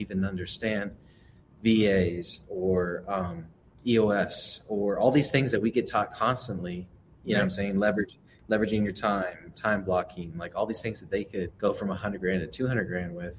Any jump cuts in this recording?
yes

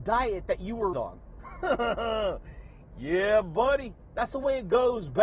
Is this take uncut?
no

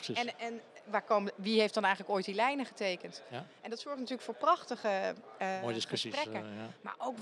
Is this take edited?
no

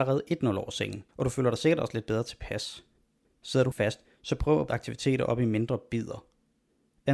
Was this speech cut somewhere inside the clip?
yes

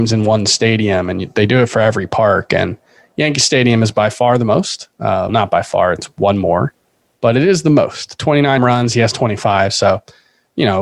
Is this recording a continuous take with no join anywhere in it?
no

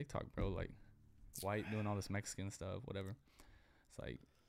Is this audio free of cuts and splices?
yes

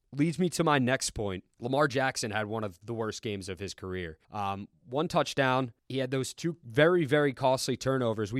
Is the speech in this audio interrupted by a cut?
yes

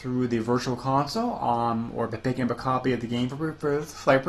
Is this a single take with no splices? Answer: yes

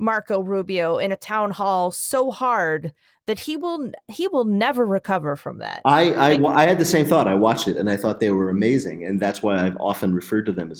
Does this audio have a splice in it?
no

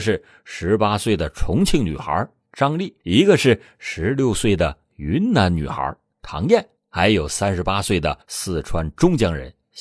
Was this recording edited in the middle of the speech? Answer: yes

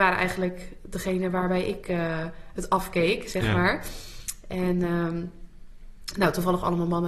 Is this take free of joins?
yes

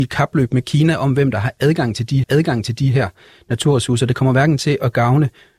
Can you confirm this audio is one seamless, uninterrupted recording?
no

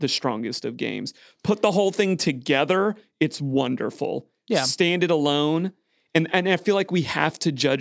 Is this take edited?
no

